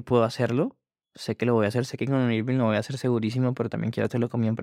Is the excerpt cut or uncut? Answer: uncut